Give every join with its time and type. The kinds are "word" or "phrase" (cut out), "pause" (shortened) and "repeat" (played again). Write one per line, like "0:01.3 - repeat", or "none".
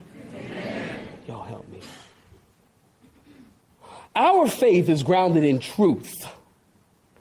none